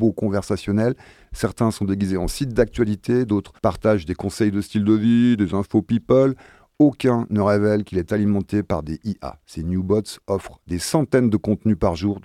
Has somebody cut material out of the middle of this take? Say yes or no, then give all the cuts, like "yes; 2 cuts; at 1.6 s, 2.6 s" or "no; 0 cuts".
yes; 1 cut; at 3.6 s